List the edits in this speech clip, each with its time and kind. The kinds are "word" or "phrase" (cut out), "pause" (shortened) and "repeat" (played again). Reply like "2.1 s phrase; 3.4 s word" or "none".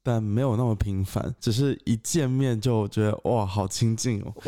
1.4 s pause